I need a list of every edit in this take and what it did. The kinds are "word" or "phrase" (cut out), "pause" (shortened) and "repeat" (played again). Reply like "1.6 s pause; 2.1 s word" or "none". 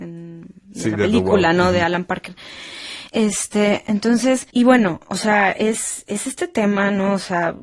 4.5 s pause